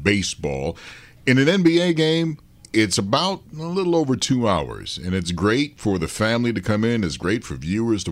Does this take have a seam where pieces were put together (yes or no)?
no